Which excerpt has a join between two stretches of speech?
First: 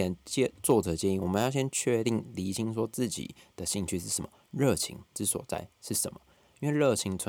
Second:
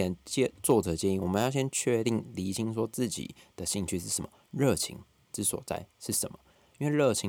first; 1 cut; at 5.1 s

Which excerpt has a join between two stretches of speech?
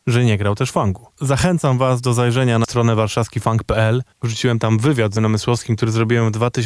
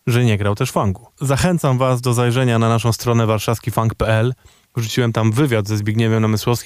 first; 3 cuts; at 2.6 s, 4.1 s, 5.2 s

